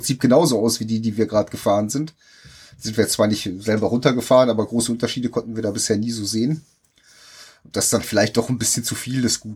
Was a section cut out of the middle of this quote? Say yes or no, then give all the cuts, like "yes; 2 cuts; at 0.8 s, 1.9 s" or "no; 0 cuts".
yes; 1 cut; at 8.0 s